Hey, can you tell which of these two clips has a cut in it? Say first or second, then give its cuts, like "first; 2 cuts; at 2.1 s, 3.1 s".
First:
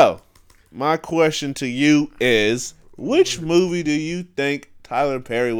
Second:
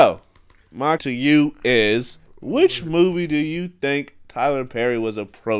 second; 1 cut; at 1.0 s